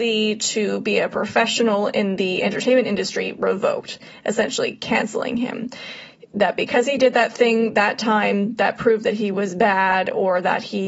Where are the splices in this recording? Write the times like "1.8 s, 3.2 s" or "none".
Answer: none

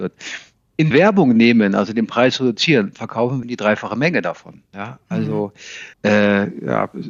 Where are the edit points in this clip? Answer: 0.9 s, 3.4 s, 5.9 s

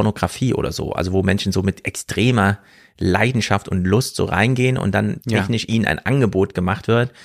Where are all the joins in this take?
none

